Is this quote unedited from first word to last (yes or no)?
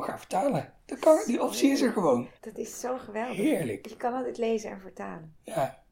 no